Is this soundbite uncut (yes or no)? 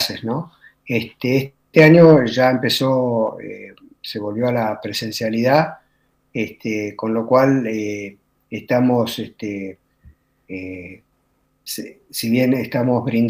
yes